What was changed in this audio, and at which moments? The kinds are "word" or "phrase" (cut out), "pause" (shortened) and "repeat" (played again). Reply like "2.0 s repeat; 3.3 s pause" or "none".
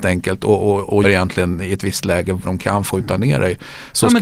1.0 s word; 2.4 s word; 2.9 s word